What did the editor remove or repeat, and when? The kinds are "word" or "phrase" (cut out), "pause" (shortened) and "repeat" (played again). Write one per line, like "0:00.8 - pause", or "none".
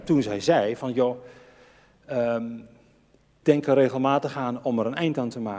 0:03.4 - word